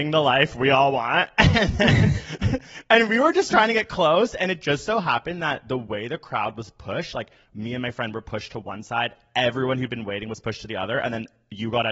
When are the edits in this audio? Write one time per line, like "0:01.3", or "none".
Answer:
none